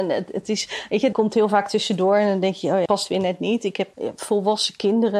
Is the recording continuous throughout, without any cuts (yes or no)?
no